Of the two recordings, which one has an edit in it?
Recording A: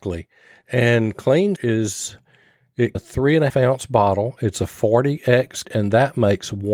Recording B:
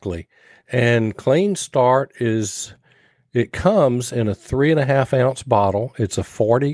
A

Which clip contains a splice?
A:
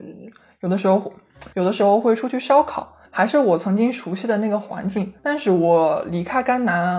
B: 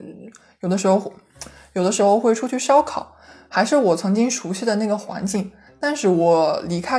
A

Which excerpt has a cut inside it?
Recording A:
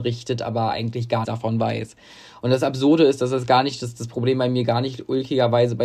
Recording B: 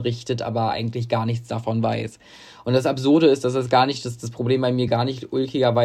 A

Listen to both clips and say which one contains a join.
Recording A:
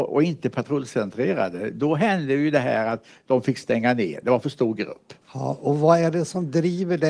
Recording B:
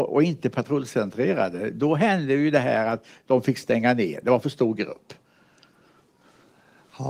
A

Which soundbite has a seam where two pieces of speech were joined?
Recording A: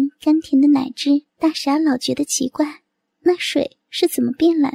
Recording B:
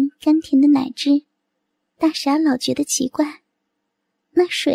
A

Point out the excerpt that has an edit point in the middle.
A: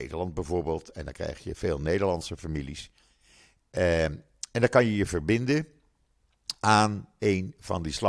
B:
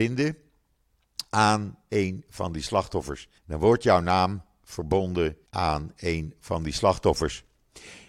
B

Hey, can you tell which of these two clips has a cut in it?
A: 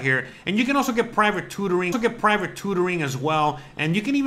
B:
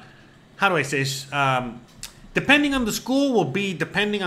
A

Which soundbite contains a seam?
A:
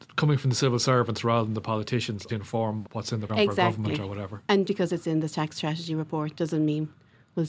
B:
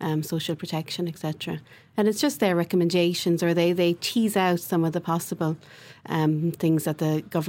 A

